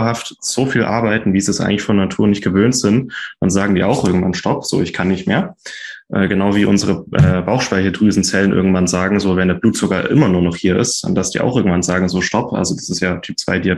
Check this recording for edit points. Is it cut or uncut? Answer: uncut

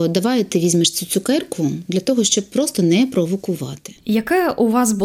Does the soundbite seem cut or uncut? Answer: cut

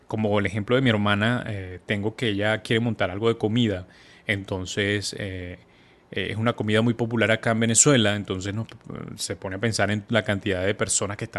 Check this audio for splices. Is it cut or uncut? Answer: uncut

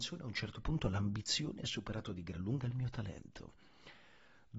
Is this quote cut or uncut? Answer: uncut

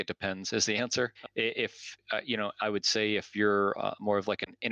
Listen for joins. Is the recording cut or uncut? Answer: uncut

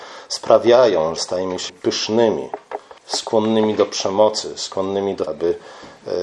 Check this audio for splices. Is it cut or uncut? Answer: cut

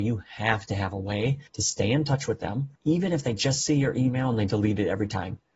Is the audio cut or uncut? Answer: cut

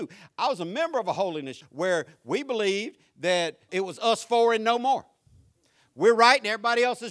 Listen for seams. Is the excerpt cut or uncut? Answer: cut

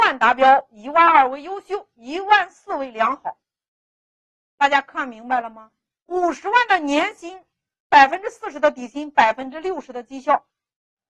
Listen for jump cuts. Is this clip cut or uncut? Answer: uncut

